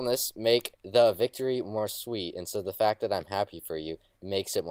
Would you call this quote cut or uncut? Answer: uncut